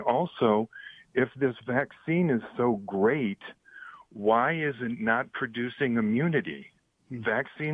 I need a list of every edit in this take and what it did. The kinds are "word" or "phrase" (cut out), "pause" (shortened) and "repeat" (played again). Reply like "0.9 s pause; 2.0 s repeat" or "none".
none